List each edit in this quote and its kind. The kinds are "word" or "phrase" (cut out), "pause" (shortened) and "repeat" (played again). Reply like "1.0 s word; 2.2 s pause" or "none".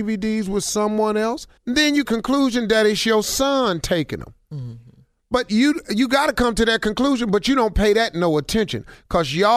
1.6 s pause; 2.0 s phrase